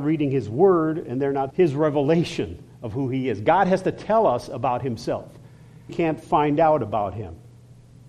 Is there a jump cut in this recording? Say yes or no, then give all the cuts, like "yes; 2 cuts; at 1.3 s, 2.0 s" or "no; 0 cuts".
yes; 2 cuts; at 1.5 s, 5.9 s